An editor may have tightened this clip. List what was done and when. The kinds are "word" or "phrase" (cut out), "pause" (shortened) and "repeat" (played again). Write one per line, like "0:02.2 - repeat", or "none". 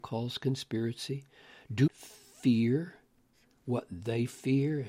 0:01.9 - word